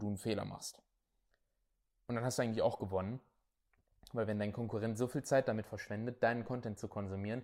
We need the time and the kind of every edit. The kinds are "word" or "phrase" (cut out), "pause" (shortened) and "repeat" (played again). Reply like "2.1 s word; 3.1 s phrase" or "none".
none